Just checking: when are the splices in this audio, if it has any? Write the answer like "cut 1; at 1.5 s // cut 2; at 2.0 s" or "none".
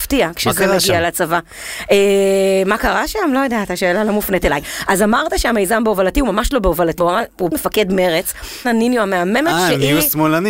cut 1; at 7.0 s // cut 2; at 7.5 s // cut 3; at 8.6 s